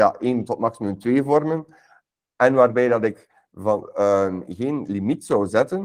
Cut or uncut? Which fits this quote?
uncut